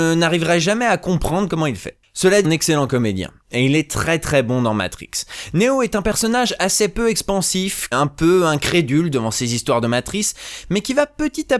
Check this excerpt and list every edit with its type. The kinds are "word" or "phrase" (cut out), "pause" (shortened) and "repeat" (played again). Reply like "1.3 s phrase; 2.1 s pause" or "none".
2.4 s phrase; 7.9 s phrase